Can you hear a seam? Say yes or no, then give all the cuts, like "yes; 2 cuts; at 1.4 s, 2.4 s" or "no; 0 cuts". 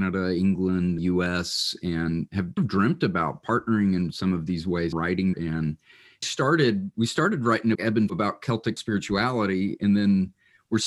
yes; 9 cuts; at 1.0 s, 2.6 s, 4.9 s, 5.3 s, 6.2 s, 6.9 s, 7.8 s, 8.1 s, 8.8 s